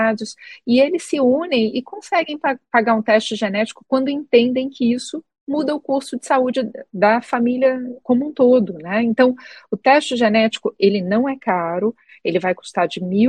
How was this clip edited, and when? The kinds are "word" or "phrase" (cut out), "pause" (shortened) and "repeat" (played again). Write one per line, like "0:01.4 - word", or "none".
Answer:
none